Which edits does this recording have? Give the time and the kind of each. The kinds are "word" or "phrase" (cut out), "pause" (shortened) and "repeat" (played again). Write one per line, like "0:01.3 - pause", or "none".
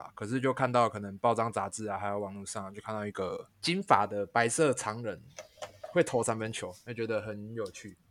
0:03.5 - pause